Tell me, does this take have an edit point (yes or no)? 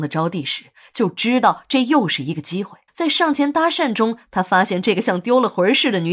yes